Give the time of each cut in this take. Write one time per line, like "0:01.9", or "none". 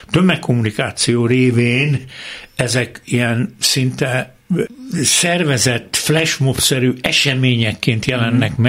none